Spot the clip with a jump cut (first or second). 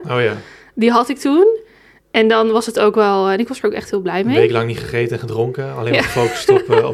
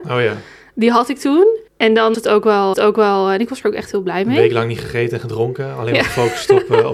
second